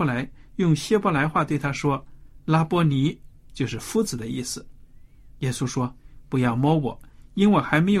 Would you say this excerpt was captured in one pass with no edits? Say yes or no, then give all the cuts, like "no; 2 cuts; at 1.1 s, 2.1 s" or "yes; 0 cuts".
no; 1 cut; at 3.4 s